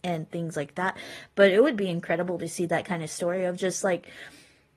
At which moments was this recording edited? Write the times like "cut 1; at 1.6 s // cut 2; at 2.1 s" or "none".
none